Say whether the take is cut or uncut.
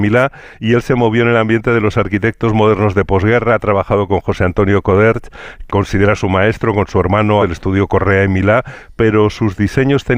cut